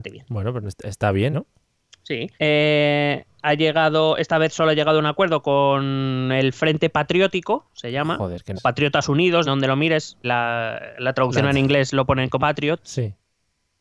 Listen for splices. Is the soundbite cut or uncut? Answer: cut